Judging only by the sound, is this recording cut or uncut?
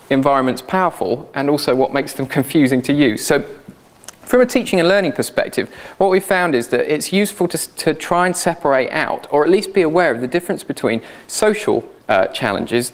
cut